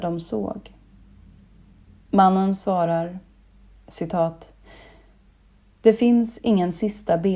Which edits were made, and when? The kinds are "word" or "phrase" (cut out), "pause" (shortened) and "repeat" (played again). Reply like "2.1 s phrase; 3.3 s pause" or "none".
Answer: none